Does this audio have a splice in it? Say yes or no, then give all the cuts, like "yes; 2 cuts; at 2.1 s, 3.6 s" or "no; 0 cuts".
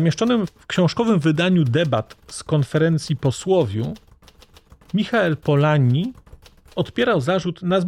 no; 0 cuts